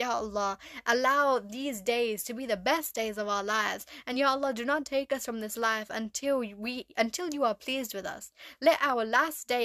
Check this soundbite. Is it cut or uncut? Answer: uncut